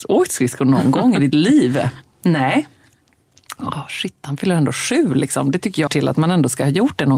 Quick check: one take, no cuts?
no; 1 cut; at 5.9 s

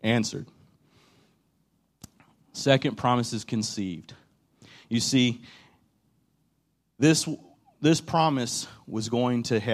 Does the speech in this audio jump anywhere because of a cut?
no; 0 cuts

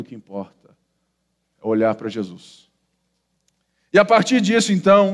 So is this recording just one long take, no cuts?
yes; 0 cuts

